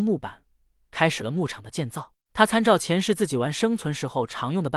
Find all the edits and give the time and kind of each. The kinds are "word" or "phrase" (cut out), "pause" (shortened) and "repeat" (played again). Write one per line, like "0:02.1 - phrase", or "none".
0:02.2 - pause